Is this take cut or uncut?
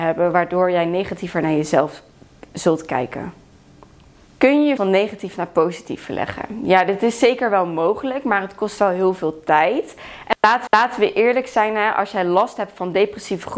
cut